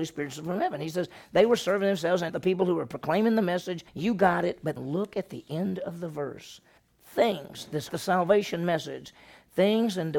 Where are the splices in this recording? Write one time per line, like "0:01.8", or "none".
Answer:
0:02.3
0:03.9
0:04.8
0:06.8
0:07.9